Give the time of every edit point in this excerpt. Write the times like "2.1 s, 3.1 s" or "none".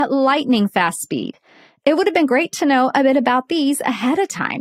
none

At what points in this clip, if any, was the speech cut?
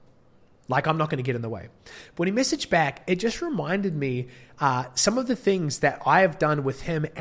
none

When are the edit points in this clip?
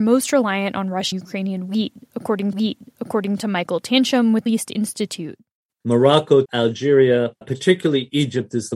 1.1 s, 2.5 s, 4.5 s, 6.4 s, 7.4 s

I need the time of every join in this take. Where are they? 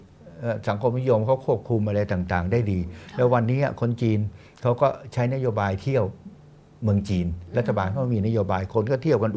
none

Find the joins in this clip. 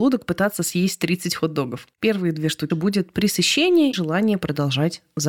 1.9 s, 2.7 s, 3.9 s

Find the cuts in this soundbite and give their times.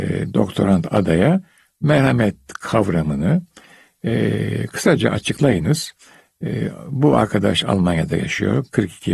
none

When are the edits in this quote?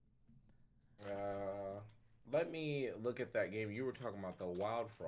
none

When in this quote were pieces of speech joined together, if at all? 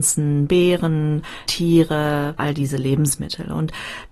1.4 s, 2.4 s

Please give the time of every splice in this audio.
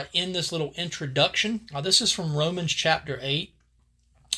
1.7 s

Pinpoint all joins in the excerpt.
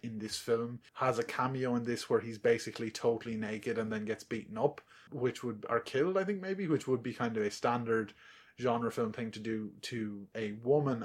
none

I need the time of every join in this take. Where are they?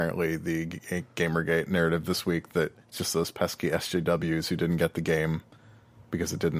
2.8 s

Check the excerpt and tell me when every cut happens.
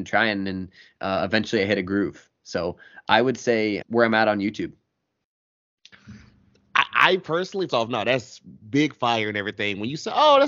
3.8 s, 7.7 s

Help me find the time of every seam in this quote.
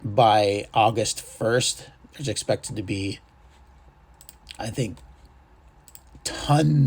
4.6 s

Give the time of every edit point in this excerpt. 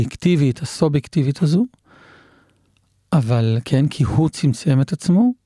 none

